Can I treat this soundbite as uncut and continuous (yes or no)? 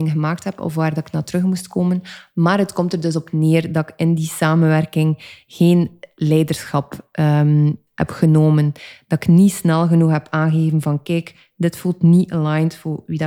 yes